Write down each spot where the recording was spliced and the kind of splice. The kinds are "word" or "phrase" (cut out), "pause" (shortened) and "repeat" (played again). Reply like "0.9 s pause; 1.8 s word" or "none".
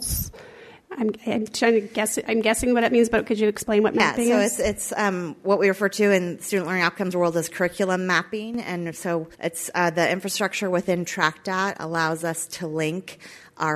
9.3 s pause